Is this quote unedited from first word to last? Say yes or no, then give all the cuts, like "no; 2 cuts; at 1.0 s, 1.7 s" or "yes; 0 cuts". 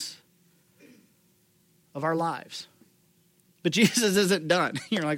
yes; 0 cuts